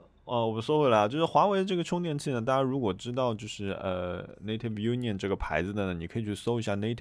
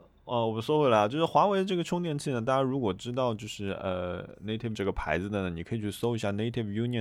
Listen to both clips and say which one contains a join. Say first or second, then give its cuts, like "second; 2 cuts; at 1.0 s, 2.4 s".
second; 1 cut; at 4.7 s